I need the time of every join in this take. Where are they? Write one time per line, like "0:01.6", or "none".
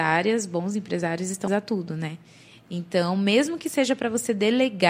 0:01.5